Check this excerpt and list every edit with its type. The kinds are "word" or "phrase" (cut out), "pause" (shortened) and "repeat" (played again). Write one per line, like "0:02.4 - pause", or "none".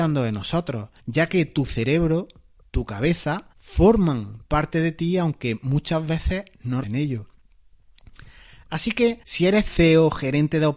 0:01.0 - pause
0:03.5 - pause
0:06.8 - word
0:09.2 - pause

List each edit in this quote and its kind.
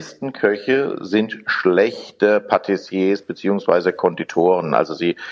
none

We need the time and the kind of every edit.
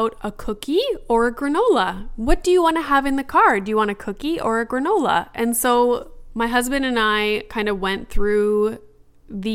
none

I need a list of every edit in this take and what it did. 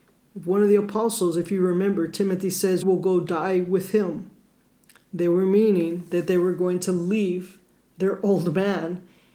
0:02.8 - word

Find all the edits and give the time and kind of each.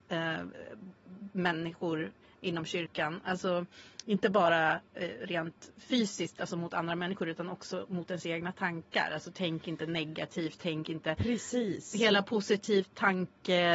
none

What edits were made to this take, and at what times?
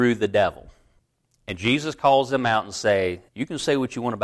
0:03.3 - pause

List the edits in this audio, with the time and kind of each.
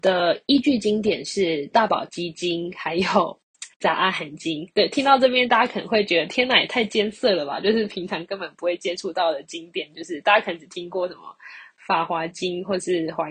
0:03.7 - pause

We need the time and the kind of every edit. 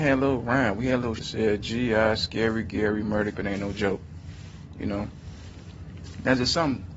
0:01.2 - word
0:03.3 - word

